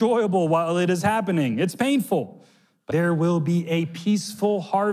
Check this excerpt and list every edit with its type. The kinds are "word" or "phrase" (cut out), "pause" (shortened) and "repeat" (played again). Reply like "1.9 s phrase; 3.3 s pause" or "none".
2.9 s word